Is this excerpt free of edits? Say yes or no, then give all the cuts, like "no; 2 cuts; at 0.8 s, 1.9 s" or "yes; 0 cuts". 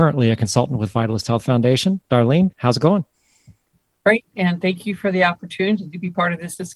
yes; 0 cuts